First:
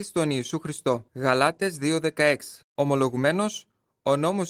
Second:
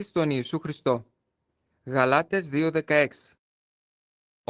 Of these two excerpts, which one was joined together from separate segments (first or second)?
first